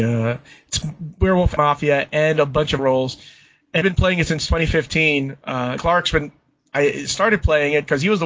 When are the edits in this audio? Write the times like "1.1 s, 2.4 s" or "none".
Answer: 1.6 s, 2.8 s, 3.8 s, 5.8 s